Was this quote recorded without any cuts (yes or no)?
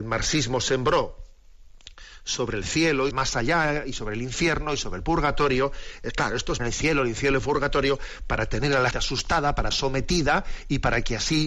no